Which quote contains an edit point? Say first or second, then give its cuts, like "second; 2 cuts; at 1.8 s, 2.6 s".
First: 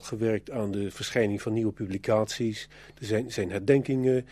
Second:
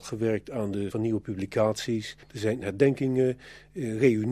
second; 3 cuts; at 0.9 s, 2.2 s, 2.6 s